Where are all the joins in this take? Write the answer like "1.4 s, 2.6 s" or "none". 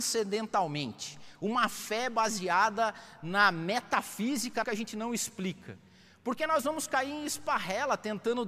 4.6 s